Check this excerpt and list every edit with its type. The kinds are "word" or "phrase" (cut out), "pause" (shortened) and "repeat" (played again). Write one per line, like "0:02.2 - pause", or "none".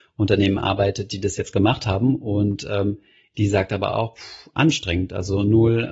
none